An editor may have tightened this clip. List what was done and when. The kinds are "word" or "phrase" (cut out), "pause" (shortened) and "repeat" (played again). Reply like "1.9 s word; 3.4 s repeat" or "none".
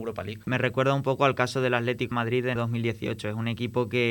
2.1 s word; 2.6 s phrase